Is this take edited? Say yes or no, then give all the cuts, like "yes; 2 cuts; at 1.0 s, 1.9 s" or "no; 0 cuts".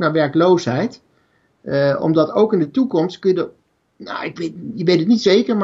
no; 0 cuts